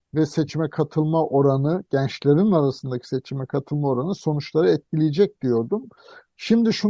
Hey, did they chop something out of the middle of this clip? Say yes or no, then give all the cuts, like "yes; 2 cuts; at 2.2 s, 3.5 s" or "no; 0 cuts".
no; 0 cuts